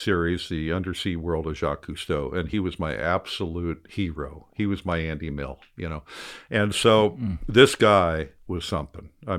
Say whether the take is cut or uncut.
uncut